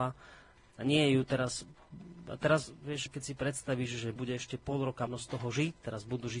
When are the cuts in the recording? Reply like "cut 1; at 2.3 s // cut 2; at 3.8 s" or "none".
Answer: cut 1; at 3.1 s // cut 2; at 4.2 s // cut 3; at 5.1 s

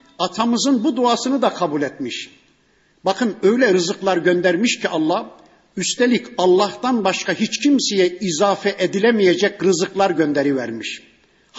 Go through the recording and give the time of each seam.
none

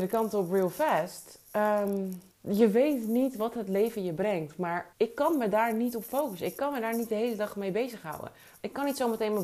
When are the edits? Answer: cut 1; at 2.3 s // cut 2; at 4.9 s

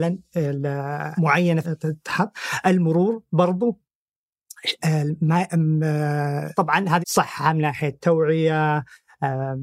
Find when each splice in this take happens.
cut 1; at 1.2 s // cut 2; at 1.6 s // cut 3; at 6.5 s // cut 4; at 7.0 s

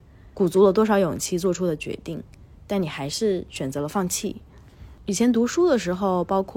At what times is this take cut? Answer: none

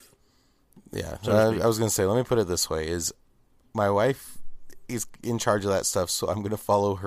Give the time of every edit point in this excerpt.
none

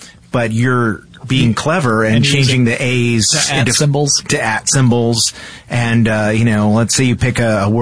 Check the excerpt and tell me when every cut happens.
none

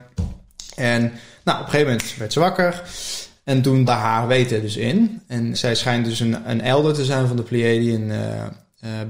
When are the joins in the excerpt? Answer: cut 1; at 3.9 s // cut 2; at 5.5 s

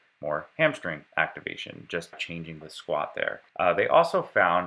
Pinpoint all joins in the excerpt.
cut 1; at 1.1 s // cut 2; at 2.1 s // cut 3; at 2.6 s // cut 4; at 3.5 s

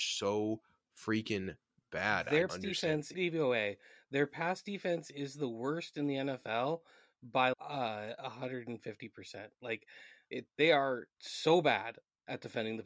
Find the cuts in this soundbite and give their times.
cut 1; at 2.5 s // cut 2; at 3.1 s // cut 3; at 7.5 s // cut 4; at 10.5 s // cut 5; at 11.1 s

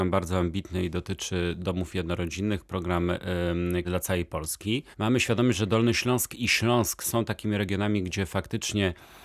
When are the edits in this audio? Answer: cut 1; at 3.8 s // cut 2; at 4.9 s

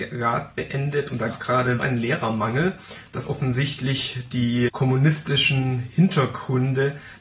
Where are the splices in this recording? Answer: cut 1; at 1.3 s // cut 2; at 1.8 s // cut 3; at 3.2 s // cut 4; at 4.7 s

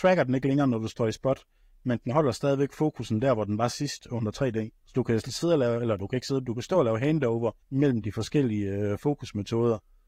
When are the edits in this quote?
cut 1; at 4.8 s // cut 2; at 7.6 s

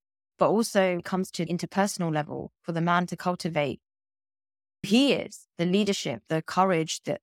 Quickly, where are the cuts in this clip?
cut 1; at 1.0 s // cut 2; at 1.5 s // cut 3; at 4.8 s // cut 4; at 6.3 s

